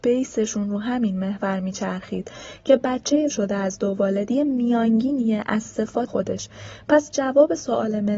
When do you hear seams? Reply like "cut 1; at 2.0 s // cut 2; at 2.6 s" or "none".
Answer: cut 1; at 3.3 s // cut 2; at 6.1 s